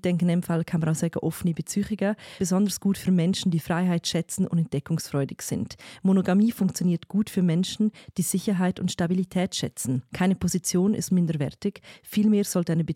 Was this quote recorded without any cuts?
no; 3 cuts; at 2.4 s, 10.1 s, 11.1 s

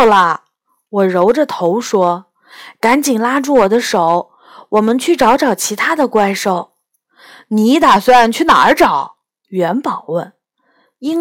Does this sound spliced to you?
no; 0 cuts

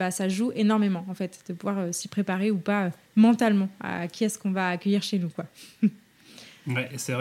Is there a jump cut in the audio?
no; 0 cuts

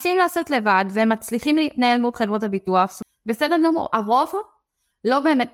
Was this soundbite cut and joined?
no; 0 cuts

